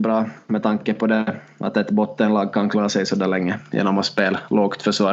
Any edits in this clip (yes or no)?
no